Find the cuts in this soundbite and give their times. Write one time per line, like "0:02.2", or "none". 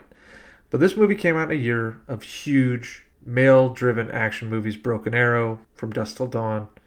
0:03.1
0:05.6